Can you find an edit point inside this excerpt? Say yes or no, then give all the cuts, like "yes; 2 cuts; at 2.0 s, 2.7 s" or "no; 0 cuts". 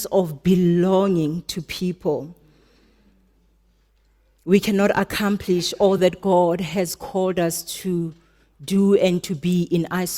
no; 0 cuts